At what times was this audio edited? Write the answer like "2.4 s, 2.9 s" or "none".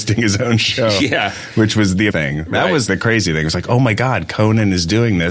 2.1 s, 2.9 s